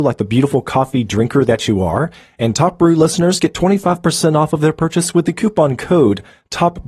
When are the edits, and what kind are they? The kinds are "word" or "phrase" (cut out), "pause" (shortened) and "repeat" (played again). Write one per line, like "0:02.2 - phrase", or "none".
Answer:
none